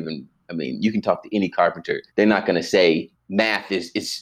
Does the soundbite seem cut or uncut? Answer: cut